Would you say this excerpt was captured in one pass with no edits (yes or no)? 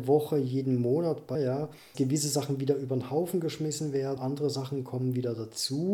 no